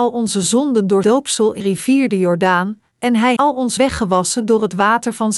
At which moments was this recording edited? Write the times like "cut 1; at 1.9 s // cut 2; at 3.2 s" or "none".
cut 1; at 1.0 s // cut 2; at 1.6 s // cut 3; at 2.9 s // cut 4; at 3.4 s // cut 5; at 3.8 s